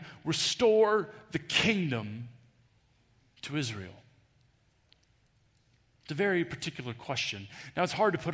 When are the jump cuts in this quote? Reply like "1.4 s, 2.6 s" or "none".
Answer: none